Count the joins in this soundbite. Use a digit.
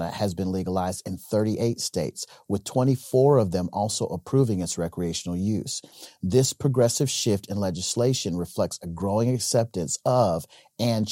0